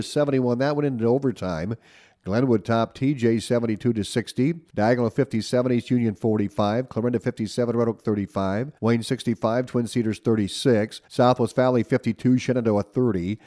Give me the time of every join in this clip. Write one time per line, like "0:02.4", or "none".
0:04.7
0:08.8
0:11.0